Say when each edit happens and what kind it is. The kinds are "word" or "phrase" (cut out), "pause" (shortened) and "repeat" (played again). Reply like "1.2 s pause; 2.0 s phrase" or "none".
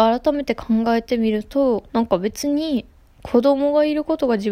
1.9 s pause